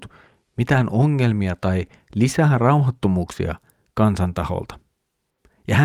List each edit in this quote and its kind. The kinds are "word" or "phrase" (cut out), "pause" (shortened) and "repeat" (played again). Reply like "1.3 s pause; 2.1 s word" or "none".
none